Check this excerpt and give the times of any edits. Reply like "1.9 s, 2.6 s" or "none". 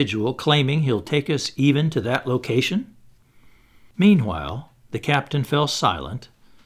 none